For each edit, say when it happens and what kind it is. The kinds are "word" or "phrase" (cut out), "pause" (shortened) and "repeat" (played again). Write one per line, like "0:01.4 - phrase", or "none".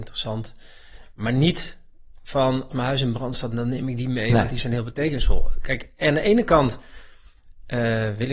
0:02.7 - phrase